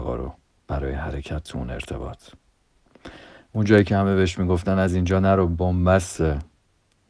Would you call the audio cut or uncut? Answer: uncut